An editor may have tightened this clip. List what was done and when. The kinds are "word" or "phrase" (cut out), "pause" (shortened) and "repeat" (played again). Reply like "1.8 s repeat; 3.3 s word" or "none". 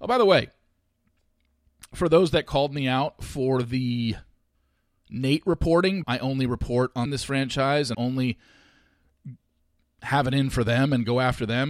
6.0 s phrase; 7.1 s phrase; 7.9 s word